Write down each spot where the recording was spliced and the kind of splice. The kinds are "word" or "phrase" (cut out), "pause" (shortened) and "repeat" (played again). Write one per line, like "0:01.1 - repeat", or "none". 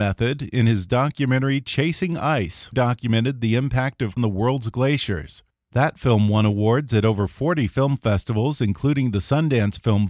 0:02.7 - phrase
0:04.2 - phrase